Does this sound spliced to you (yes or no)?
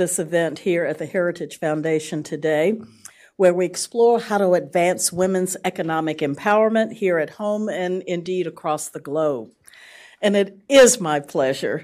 no